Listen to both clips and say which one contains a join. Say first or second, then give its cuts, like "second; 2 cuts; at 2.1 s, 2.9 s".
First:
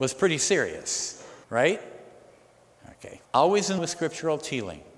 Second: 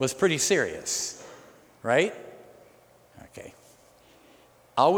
first; 3 cuts; at 1.4 s, 3.2 s, 3.8 s